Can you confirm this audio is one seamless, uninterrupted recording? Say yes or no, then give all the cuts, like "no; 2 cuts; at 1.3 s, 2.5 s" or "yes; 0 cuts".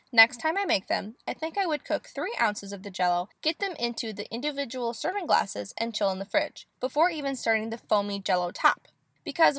no; 2 cuts; at 3.4 s, 6.7 s